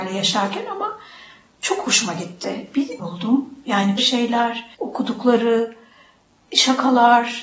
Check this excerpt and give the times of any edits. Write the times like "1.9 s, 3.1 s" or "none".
3.0 s, 4.0 s, 4.7 s